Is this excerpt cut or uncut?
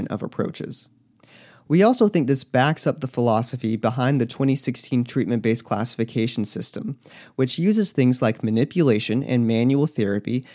uncut